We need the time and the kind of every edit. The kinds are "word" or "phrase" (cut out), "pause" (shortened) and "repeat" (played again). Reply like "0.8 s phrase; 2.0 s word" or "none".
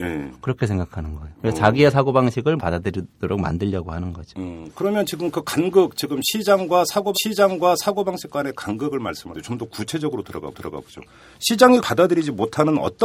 2.6 s word; 7.1 s repeat; 9.3 s word; 10.5 s repeat; 11.8 s word